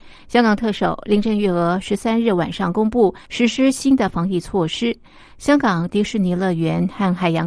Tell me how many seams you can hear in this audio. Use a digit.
1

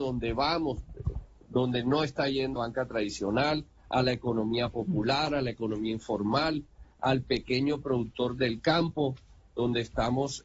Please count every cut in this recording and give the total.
1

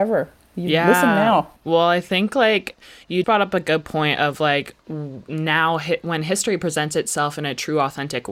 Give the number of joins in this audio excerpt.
3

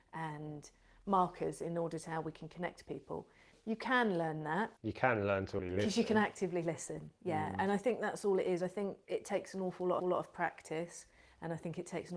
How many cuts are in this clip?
4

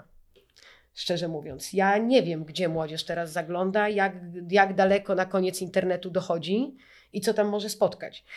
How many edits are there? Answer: 0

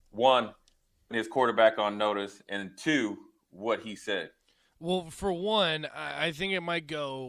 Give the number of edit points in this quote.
1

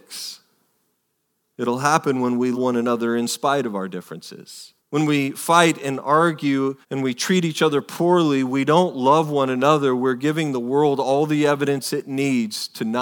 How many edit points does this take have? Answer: 3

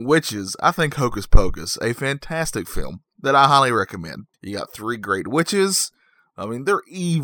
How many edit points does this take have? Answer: 1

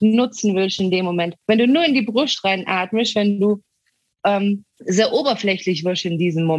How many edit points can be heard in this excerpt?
2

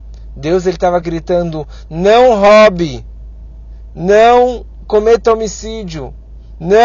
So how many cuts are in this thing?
0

